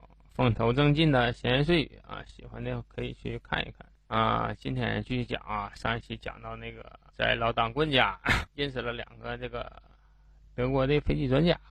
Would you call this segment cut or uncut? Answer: cut